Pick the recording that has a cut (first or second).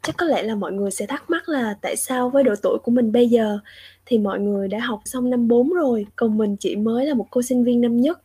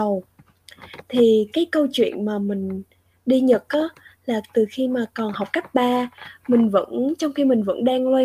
first